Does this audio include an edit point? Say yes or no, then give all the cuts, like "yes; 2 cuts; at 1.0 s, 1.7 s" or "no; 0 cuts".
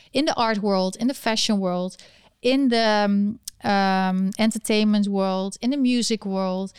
no; 0 cuts